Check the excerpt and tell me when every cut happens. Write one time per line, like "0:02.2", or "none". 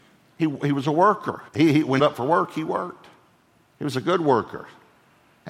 0:01.5
0:02.0
0:03.6